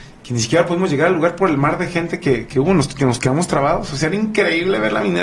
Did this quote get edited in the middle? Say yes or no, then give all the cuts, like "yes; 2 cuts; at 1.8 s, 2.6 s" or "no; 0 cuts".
no; 0 cuts